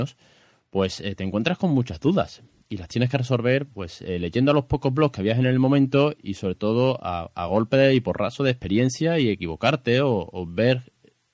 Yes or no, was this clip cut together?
no